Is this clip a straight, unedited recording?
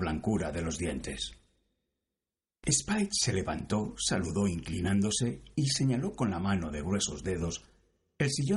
yes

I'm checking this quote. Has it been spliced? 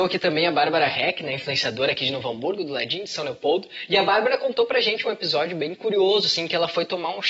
no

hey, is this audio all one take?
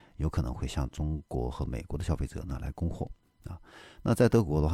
yes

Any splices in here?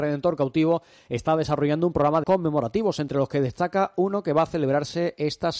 yes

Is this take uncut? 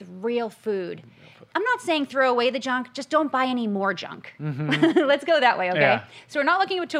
no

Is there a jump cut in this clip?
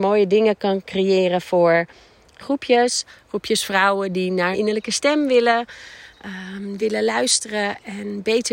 yes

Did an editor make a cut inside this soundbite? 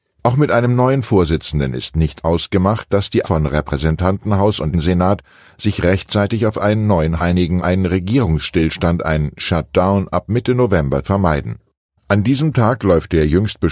yes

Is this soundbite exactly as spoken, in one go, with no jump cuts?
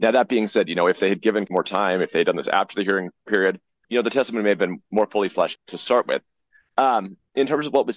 no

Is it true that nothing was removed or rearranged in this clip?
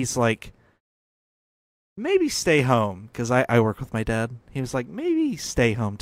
yes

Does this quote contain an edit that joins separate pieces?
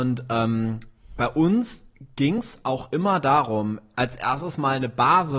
no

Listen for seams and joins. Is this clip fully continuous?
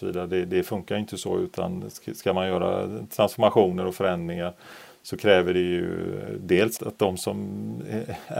no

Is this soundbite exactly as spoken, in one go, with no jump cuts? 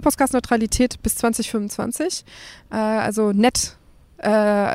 yes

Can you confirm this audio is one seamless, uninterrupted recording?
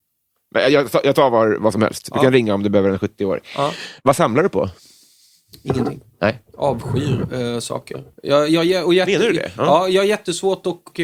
yes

